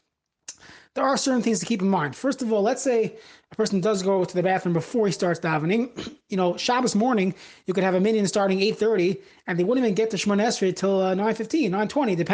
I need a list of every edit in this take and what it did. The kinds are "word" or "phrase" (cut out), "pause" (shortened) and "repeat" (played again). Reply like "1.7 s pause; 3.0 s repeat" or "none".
none